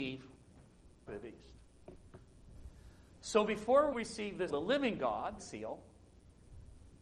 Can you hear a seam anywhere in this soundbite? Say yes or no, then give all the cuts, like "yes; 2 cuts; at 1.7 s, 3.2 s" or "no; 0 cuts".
yes; 4 cuts; at 1.1 s, 3.9 s, 4.5 s, 5.4 s